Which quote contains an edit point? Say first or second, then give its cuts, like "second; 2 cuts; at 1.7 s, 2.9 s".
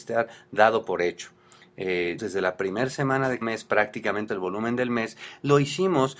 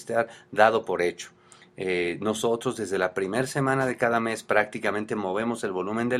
first; 3 cuts; at 2.2 s, 3.4 s, 4.3 s